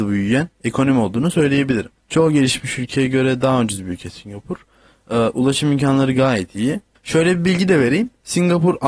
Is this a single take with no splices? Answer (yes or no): yes